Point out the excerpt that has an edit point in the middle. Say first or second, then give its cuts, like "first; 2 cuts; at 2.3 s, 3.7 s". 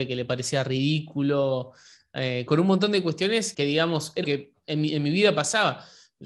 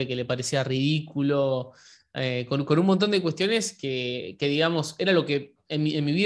first; 3 cuts; at 2.5 s, 3.5 s, 4.2 s